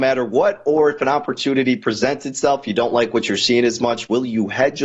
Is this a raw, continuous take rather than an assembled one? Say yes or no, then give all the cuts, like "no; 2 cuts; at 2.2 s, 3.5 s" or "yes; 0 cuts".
yes; 0 cuts